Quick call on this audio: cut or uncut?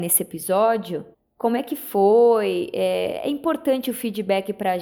cut